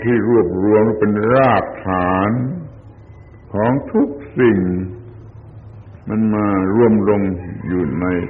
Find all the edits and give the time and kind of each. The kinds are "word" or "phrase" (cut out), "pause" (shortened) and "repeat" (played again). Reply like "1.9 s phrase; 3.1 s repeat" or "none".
3.4 s pause